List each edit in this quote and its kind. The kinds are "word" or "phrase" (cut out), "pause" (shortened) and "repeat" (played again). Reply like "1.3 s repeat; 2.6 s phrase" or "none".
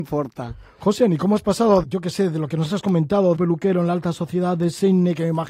1.8 s word; 3.4 s phrase